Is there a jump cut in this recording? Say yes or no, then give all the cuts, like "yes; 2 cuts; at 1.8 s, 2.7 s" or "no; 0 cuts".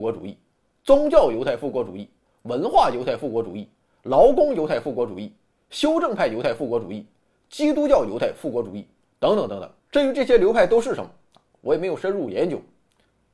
yes; 1 cut; at 9.8 s